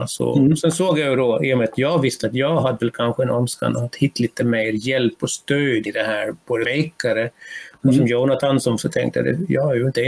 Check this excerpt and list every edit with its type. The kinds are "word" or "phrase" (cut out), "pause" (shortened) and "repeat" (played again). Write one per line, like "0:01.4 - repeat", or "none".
0:05.9 - word
0:06.6 - word
0:08.8 - word

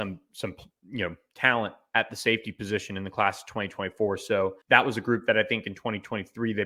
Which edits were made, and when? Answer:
0:04.6 - pause

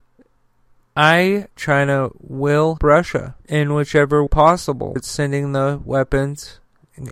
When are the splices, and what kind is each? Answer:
0:01.6 - phrase
0:02.8 - word
0:03.4 - pause
0:04.3 - word
0:05.0 - word

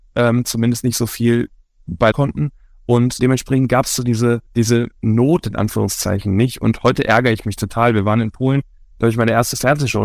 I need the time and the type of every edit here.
0:02.1 - phrase
0:03.2 - word
0:04.5 - pause

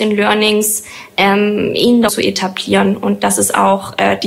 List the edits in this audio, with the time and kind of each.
0:02.1 - word

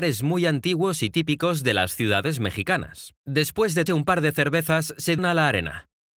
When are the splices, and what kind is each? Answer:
0:03.2 - pause
0:03.9 - word
0:05.2 - word

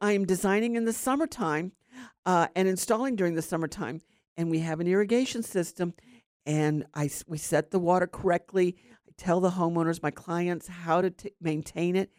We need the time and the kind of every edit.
none

